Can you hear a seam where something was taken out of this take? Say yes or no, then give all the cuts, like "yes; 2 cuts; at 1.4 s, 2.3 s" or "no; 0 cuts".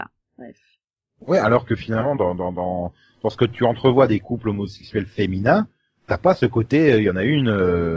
no; 0 cuts